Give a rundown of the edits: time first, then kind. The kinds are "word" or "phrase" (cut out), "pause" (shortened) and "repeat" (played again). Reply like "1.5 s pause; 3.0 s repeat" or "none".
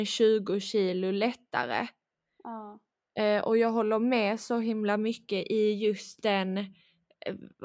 none